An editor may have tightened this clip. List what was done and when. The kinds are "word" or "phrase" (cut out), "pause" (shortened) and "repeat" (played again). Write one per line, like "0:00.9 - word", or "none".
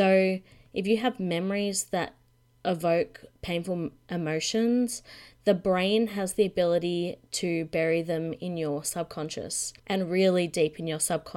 0:03.4 - pause
0:09.8 - pause